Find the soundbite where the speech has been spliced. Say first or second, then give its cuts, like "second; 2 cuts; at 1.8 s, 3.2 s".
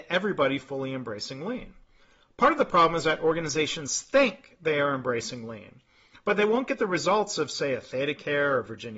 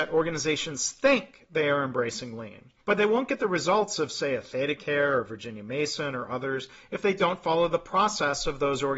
second; 1 cut; at 2.8 s